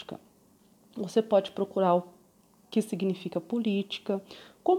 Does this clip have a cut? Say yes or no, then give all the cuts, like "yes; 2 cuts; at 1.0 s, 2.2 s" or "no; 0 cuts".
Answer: no; 0 cuts